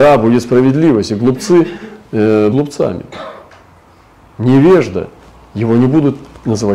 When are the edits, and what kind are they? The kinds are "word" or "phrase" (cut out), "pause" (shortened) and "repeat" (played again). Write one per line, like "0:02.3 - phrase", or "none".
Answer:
0:02.5 - word